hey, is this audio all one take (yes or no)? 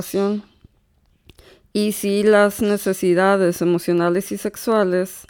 yes